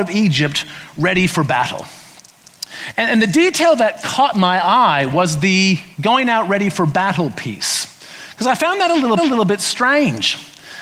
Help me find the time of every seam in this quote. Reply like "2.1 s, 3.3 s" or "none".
5.9 s, 9.2 s